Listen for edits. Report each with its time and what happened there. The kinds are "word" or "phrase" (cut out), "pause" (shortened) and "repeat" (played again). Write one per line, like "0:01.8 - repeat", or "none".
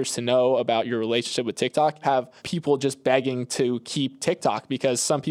0:02.0 - phrase
0:02.4 - pause